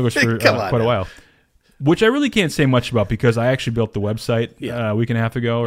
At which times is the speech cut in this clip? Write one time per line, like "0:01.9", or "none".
none